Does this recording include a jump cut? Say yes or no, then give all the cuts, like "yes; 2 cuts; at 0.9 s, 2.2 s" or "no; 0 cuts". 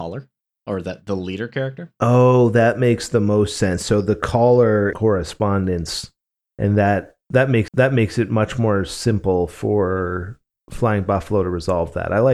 yes; 2 cuts; at 4.9 s, 7.7 s